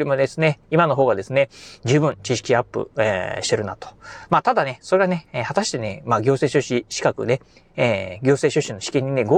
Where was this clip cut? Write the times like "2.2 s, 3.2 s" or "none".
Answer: none